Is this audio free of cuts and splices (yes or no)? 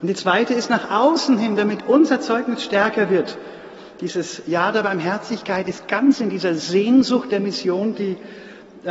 yes